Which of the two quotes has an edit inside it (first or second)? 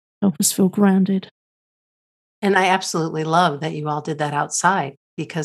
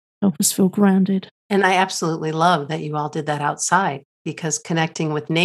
second